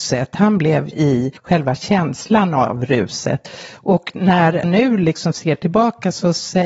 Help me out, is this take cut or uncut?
cut